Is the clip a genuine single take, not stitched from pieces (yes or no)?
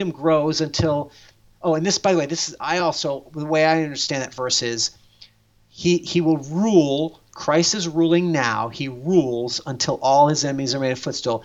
yes